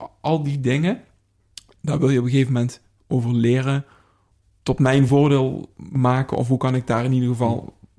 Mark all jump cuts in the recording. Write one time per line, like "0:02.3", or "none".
none